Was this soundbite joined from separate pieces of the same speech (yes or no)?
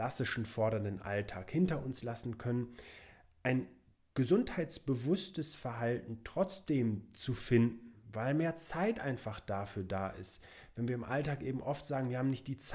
no